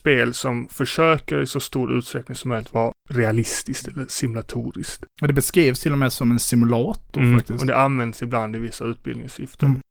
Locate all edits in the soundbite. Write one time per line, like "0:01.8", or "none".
none